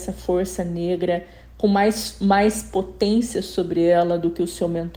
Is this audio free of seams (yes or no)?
yes